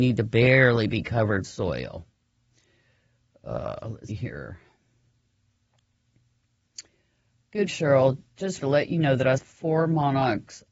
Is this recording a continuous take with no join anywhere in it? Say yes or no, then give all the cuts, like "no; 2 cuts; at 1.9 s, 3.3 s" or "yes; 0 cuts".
no; 5 cuts; at 1.4 s, 4.1 s, 7.7 s, 8.6 s, 9.4 s